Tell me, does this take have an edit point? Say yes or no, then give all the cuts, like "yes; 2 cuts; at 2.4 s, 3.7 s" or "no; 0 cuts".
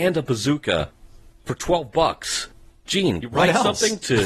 yes; 1 cut; at 3.2 s